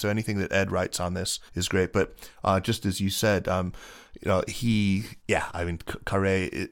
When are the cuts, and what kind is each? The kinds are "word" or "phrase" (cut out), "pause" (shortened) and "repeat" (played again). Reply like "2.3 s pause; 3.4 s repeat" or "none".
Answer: 1.5 s pause; 5.2 s pause